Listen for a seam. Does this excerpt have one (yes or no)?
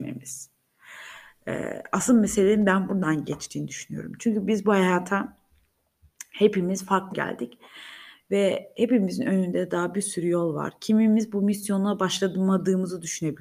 yes